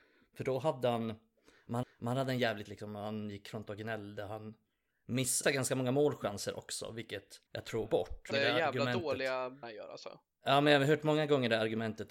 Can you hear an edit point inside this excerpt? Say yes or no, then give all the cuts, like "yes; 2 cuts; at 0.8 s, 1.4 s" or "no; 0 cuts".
yes; 7 cuts; at 1.8 s, 2.7 s, 5.4 s, 7.5 s, 7.9 s, 8.3 s, 9.6 s